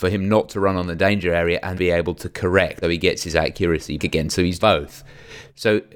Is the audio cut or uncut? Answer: cut